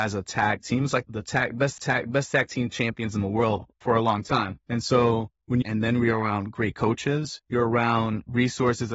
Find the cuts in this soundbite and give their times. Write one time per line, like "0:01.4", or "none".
0:01.1
0:01.8
0:03.7
0:04.6
0:05.6
0:07.4